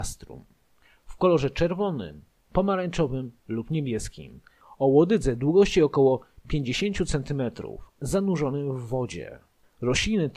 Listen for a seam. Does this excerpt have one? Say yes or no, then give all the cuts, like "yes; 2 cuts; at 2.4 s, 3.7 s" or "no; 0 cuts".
no; 0 cuts